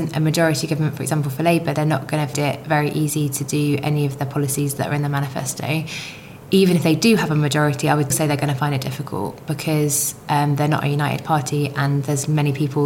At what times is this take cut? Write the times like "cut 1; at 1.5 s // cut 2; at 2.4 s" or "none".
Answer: cut 1; at 1.8 s // cut 2; at 2.3 s // cut 3; at 8.1 s